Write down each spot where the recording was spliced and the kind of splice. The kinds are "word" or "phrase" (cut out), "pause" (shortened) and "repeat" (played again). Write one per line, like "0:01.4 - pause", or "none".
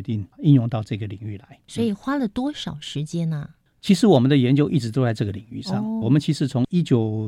0:06.0 - word